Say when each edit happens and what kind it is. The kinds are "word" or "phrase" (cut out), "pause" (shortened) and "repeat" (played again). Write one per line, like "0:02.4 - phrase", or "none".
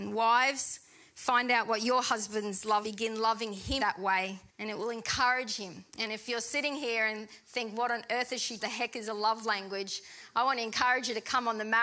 0:02.8 - phrase
0:03.8 - word
0:04.5 - pause
0:05.9 - pause
0:08.6 - phrase

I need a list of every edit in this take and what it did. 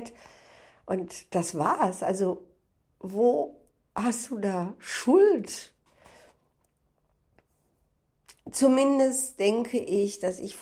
none

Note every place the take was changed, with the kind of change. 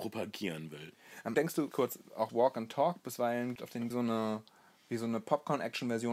0:01.3 - word
0:01.7 - word
0:02.3 - phrase
0:03.6 - word
0:03.9 - phrase

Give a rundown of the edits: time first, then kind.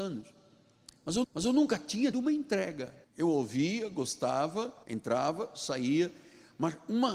0:01.2 - repeat
0:02.1 - word
0:03.0 - pause
0:04.8 - pause

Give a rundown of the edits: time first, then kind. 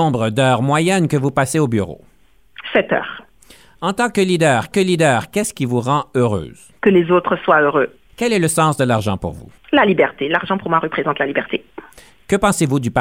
0:04.7 - repeat

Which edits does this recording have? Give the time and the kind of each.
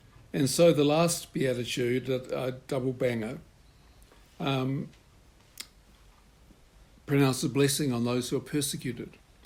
none

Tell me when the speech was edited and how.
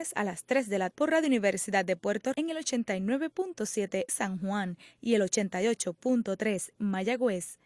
0:00.9 - word
0:02.3 - word
0:04.1 - word
0:06.7 - word

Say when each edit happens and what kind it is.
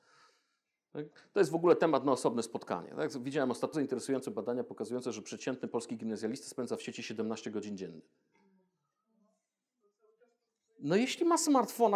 0:03.7 - word

